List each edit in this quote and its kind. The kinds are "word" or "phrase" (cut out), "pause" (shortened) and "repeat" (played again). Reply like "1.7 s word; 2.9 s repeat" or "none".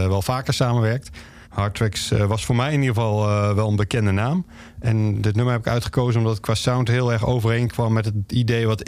1.4 s pause